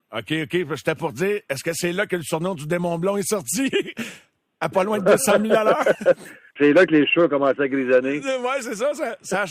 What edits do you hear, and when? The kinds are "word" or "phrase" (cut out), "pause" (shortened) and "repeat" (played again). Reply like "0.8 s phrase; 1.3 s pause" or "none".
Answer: 6.6 s word